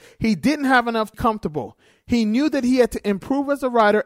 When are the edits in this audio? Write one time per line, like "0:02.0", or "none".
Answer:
0:01.1